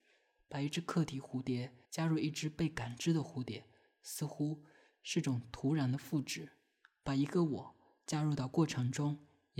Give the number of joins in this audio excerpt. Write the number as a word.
one